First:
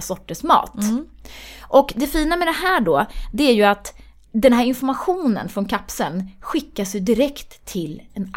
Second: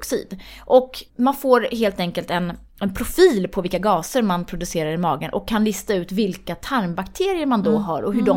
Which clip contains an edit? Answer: second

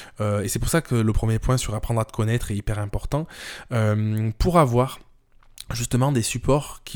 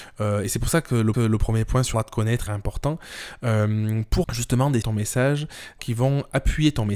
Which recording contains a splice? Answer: second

